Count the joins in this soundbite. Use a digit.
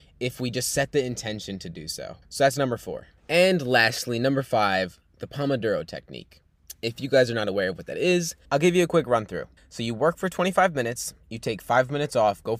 4